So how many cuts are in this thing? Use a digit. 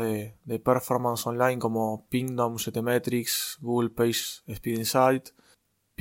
0